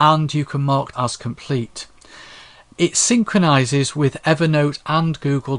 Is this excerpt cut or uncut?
cut